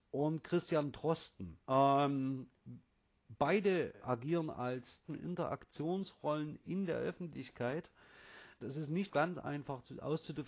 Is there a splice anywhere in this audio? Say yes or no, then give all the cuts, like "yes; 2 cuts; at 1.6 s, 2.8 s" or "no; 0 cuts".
yes; 5 cuts; at 1.6 s, 4.0 s, 5.1 s, 8.6 s, 9.1 s